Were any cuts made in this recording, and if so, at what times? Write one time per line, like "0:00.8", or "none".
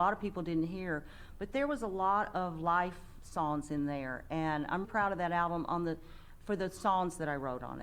0:04.8